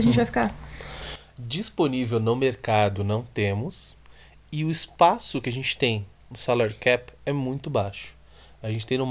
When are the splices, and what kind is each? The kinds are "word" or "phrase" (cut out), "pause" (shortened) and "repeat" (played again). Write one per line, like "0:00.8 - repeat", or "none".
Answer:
none